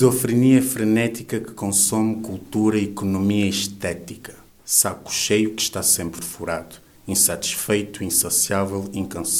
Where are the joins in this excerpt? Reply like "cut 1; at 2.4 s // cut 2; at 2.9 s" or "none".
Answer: none